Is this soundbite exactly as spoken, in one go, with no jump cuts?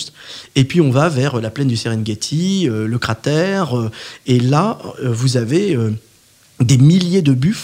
yes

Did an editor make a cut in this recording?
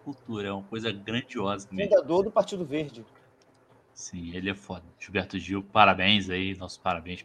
no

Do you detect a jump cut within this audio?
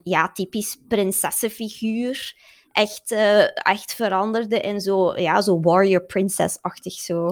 no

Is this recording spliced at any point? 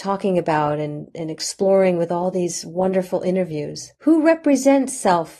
no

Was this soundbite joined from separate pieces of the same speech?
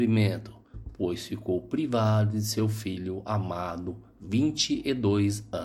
no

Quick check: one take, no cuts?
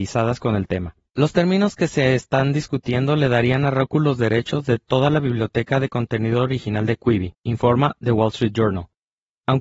no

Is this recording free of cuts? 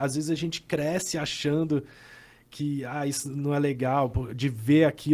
yes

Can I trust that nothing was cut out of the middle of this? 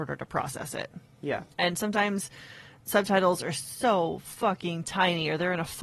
no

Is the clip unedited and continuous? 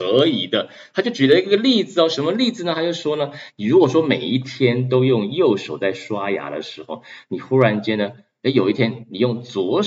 yes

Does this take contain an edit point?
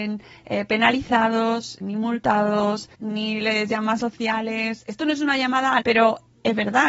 yes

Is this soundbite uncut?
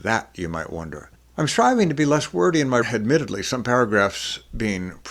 no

